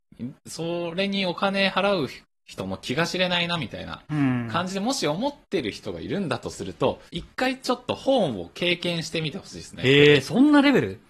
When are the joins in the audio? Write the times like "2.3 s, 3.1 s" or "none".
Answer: 7.1 s